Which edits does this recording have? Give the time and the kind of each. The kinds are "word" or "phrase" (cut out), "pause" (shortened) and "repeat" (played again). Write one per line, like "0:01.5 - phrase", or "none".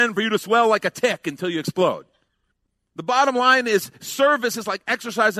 none